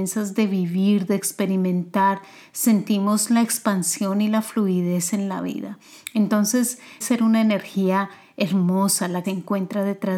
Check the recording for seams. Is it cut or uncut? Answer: cut